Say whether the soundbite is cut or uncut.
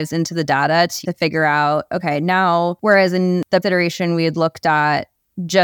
cut